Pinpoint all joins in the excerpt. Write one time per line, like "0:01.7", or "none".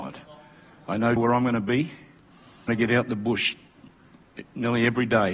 0:01.2
0:02.7